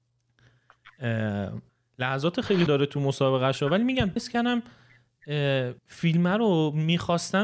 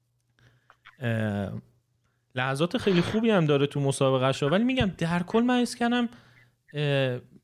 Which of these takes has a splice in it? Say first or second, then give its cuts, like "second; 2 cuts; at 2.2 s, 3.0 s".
first; 4 cuts; at 1.7 s, 2.7 s, 4.2 s, 5.8 s